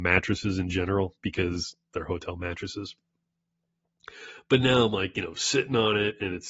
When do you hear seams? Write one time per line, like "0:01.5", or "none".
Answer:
none